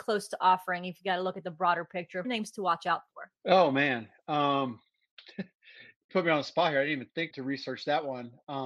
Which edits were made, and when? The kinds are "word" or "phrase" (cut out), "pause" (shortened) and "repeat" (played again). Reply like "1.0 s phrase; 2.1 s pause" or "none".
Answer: 2.2 s phrase; 3.4 s pause; 6.1 s word; 7.3 s word